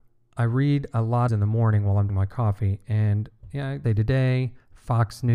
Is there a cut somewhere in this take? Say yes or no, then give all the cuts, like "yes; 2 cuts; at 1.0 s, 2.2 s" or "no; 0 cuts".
yes; 3 cuts; at 1.3 s, 2.1 s, 3.8 s